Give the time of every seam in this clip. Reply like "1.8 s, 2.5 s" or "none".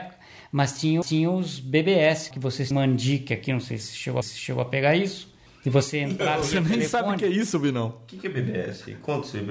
1.0 s, 2.3 s, 2.7 s, 4.2 s, 5.5 s

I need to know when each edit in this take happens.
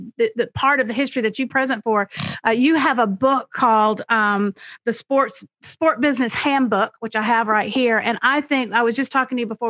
1.5 s

